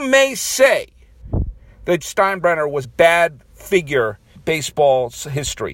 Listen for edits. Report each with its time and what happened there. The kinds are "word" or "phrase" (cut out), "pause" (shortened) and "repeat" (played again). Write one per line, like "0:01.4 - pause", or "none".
0:02.0 - word
0:02.8 - word
0:04.3 - word